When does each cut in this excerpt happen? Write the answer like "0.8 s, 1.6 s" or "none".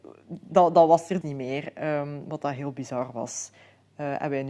1.2 s